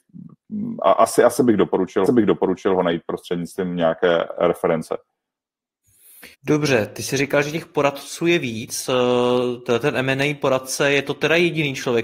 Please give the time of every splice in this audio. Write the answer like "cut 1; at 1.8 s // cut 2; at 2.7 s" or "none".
cut 1; at 2.1 s // cut 2; at 6.3 s